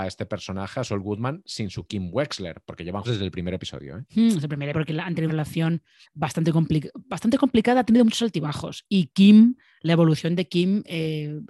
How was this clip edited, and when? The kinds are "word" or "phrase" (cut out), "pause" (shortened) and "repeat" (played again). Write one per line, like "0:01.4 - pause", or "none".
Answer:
0:03.0 - word
0:04.7 - word
0:05.3 - word
0:06.0 - word